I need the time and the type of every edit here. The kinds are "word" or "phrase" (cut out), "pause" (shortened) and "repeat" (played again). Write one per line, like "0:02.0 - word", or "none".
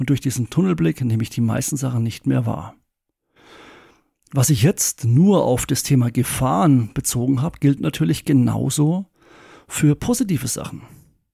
none